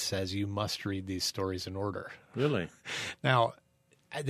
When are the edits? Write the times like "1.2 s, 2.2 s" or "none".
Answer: none